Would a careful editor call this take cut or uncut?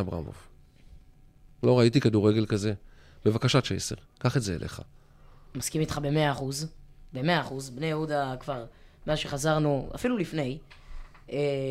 uncut